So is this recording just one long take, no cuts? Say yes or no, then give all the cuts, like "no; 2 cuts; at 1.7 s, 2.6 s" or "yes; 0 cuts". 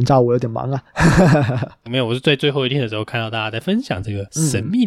no; 1 cut; at 1.9 s